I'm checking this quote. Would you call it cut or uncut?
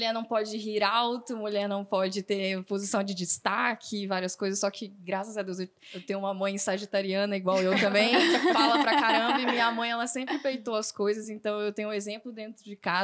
uncut